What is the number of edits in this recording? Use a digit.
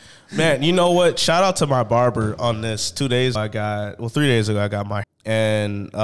2